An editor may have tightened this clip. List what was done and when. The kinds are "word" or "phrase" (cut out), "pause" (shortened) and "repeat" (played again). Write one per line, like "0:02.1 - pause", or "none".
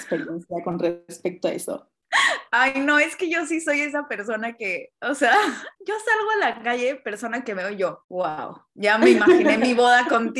0:05.7 - pause
0:08.0 - pause